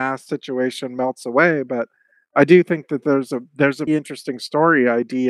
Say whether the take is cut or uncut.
cut